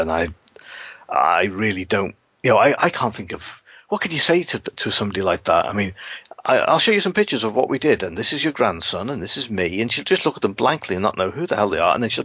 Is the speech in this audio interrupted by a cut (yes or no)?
no